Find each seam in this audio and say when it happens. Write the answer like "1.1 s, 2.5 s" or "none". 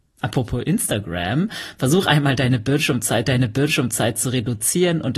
3.3 s